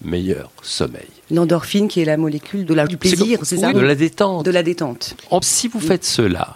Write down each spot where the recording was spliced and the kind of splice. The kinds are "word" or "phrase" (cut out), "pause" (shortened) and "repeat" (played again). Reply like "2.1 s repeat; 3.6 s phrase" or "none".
1.2 s pause; 2.9 s word; 3.7 s word; 5.4 s word